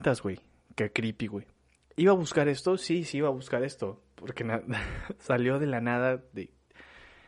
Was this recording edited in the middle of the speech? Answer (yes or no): no